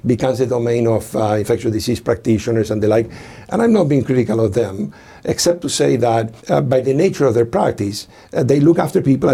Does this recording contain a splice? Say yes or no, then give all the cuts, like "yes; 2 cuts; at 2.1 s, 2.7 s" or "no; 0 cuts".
yes; 1 cut; at 6.4 s